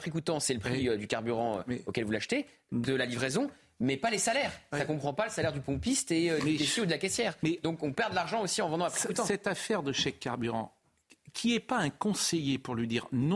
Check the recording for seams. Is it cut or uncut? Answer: uncut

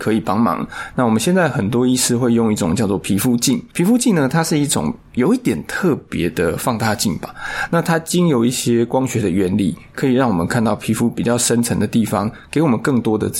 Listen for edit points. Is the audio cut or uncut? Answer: cut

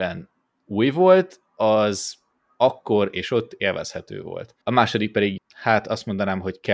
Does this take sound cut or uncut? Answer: cut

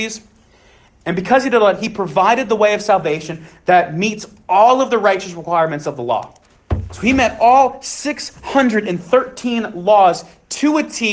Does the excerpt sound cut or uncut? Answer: uncut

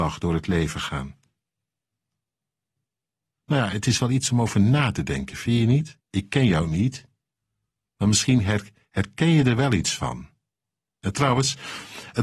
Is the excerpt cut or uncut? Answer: cut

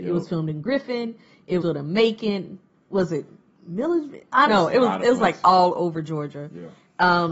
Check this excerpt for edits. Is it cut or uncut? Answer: cut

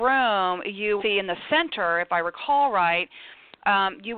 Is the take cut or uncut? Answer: cut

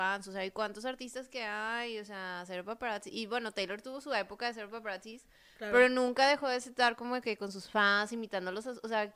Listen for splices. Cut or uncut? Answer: uncut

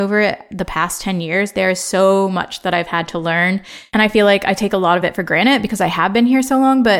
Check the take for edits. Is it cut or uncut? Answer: uncut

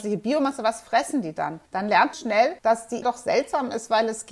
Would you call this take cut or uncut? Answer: cut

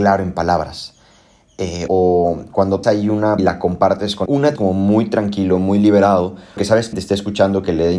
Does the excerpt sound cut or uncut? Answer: cut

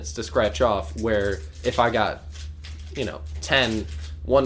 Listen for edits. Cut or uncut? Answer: uncut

